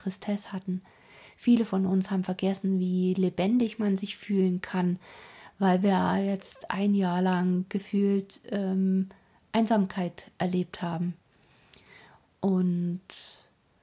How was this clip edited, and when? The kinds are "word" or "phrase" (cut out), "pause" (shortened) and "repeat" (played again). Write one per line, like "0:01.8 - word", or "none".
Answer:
none